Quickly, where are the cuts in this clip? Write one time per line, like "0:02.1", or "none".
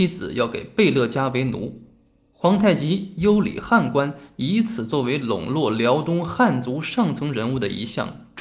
none